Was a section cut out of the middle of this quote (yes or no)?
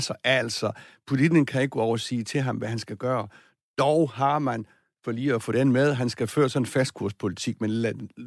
no